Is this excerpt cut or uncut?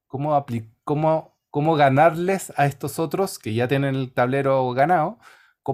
uncut